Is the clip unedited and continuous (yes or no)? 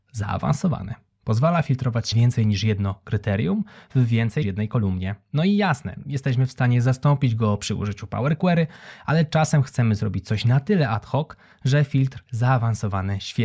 no